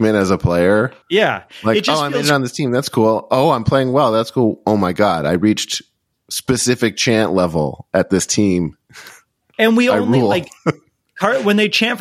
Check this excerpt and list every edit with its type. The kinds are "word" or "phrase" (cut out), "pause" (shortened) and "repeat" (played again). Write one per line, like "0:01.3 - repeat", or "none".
0:01.0 - pause

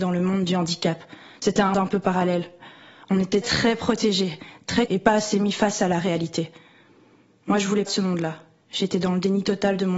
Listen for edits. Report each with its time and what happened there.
0:01.7 - word
0:03.4 - word
0:04.9 - word
0:07.9 - word

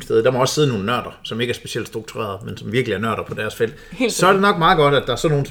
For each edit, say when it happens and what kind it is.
none

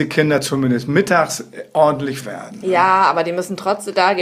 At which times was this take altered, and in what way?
0:02.2 - word

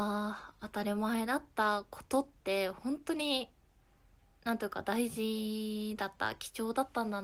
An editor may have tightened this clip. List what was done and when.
none

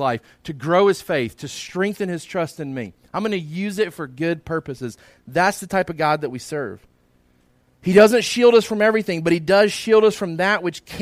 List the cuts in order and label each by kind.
none

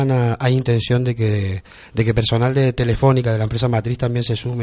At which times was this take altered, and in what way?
none

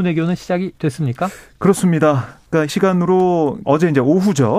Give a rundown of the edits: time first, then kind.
0:02.7 - word
0:03.6 - word

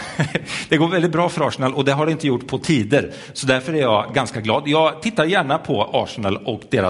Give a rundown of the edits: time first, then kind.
none

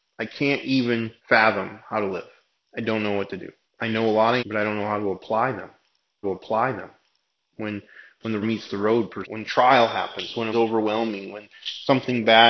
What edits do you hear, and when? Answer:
0:01.2 - pause
0:02.6 - pause
0:03.6 - pause
0:04.4 - word
0:06.2 - repeat
0:08.4 - word
0:09.2 - word
0:10.5 - word

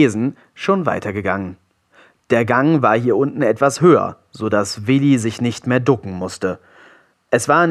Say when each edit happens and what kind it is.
none

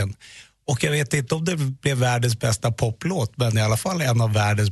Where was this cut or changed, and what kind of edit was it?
none

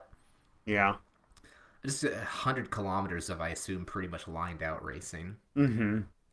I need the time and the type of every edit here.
none

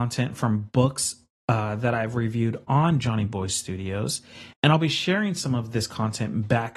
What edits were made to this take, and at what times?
0:04.5 - pause

